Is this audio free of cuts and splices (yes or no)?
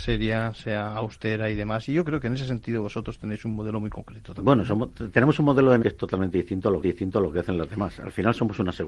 no